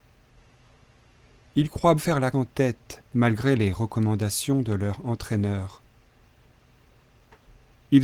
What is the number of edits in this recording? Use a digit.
3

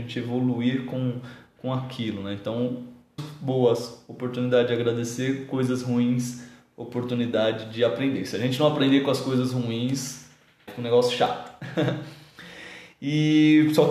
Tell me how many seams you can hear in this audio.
2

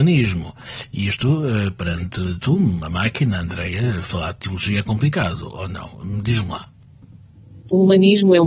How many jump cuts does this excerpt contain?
0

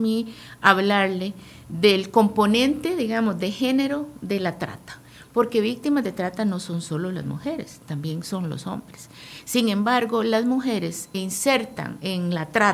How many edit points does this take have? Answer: 1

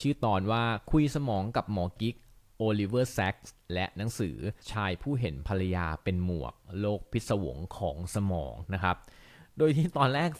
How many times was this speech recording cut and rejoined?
1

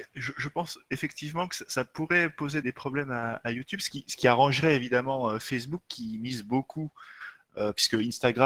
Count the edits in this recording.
2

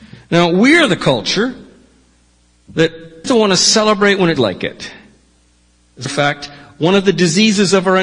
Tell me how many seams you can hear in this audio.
3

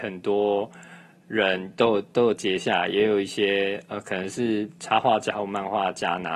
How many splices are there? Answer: 0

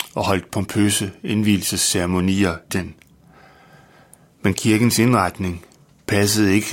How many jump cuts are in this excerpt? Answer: 1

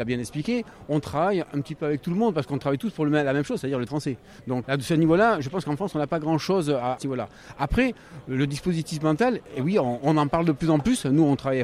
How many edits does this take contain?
3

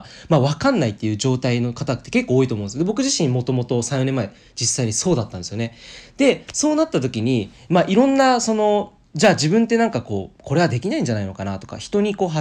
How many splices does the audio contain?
1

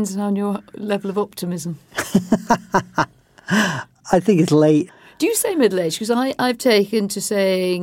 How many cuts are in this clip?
0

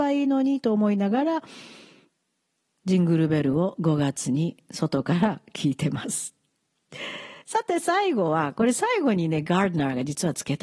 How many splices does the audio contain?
1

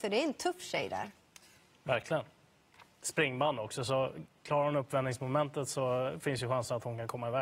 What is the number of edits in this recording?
0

